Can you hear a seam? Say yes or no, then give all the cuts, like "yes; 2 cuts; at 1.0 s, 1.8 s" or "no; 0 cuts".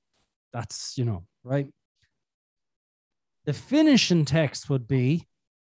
no; 0 cuts